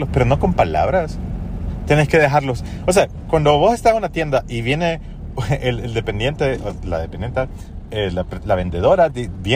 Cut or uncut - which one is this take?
uncut